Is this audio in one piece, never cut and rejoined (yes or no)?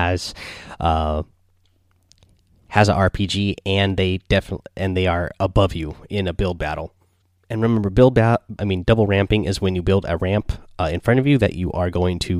no